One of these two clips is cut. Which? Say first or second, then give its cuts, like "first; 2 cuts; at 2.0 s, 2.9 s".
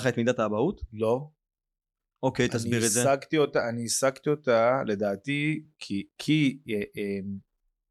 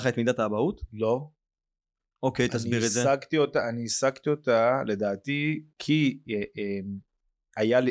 second; 1 cut; at 5.7 s